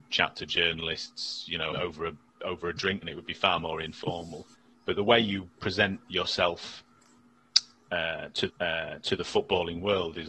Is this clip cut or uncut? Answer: cut